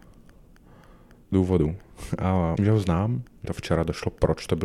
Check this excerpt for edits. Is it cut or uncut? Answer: cut